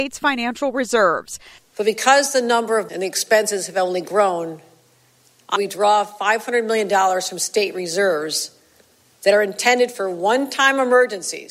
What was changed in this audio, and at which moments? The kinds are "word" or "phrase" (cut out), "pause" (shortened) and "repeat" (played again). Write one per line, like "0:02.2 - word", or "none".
0:02.9 - word
0:05.6 - phrase